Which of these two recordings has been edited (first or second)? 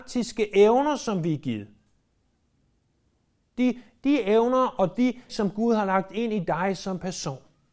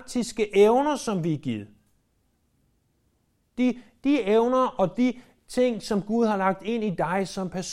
first